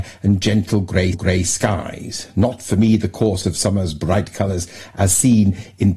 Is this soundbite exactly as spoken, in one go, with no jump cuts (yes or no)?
no